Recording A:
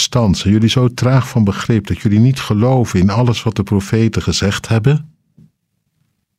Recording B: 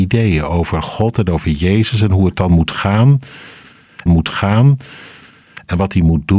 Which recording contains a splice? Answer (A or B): B